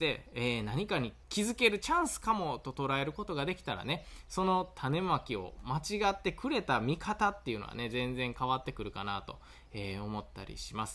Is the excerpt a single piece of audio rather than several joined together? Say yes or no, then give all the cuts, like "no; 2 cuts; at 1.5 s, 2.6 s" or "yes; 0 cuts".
no; 1 cut; at 1.2 s